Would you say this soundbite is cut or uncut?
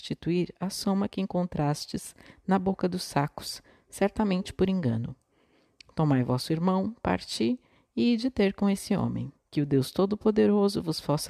cut